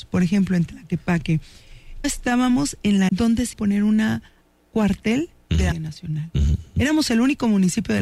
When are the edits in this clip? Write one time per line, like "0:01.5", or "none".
0:02.0
0:03.1
0:03.5
0:04.7
0:05.7